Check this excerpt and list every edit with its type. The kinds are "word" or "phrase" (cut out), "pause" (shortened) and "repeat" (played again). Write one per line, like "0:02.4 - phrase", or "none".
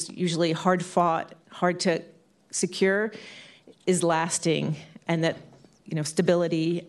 none